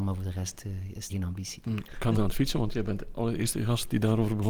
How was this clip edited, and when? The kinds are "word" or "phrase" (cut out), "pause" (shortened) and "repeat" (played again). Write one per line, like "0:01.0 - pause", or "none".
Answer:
0:01.1 - word
0:02.1 - word